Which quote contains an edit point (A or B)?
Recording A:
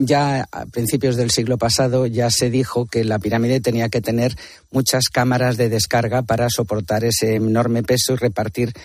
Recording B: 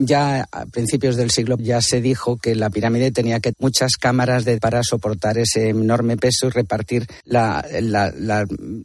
B